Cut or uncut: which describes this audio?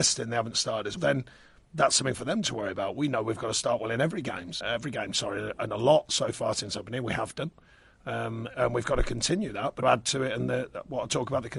cut